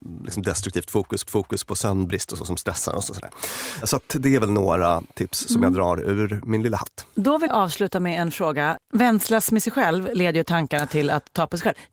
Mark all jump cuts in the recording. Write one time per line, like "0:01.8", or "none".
0:01.2
0:07.5

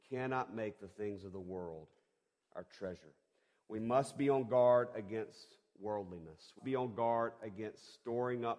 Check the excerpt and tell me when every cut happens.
0:06.6

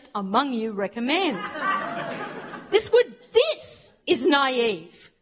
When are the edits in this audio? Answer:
0:04.0

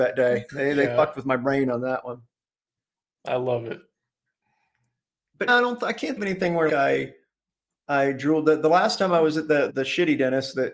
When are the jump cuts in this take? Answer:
0:05.5
0:06.2
0:06.7
0:09.7

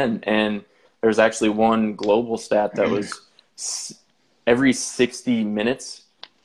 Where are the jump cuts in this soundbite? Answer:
none

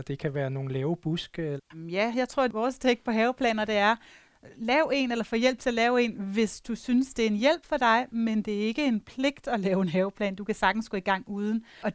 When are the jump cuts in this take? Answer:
none

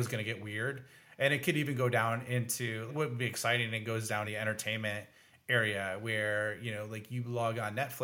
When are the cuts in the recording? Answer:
0:02.9
0:04.2

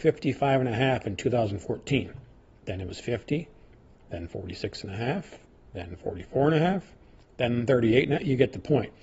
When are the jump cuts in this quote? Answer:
none

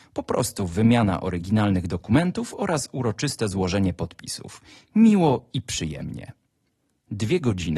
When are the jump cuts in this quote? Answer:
none

